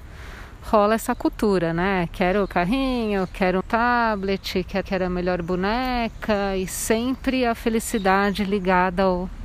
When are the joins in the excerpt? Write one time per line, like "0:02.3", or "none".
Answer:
0:02.5
0:03.6
0:04.8